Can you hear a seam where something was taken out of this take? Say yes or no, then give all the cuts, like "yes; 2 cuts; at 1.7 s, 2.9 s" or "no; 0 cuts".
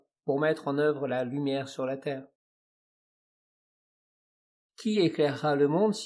no; 0 cuts